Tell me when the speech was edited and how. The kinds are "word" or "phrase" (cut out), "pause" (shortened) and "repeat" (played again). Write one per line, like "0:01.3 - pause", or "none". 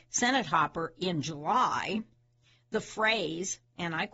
none